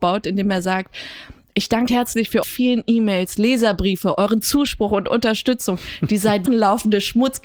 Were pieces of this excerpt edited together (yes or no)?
yes